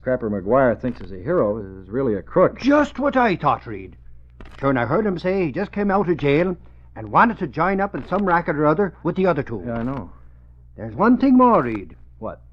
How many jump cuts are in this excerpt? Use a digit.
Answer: 0